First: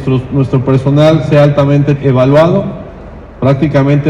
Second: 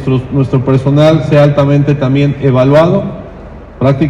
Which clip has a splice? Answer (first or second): first